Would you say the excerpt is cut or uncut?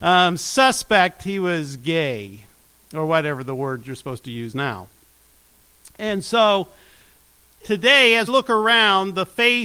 cut